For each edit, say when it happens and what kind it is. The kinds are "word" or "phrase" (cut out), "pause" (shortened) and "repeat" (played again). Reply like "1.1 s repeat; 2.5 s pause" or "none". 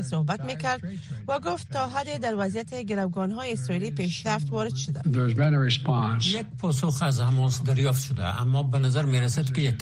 none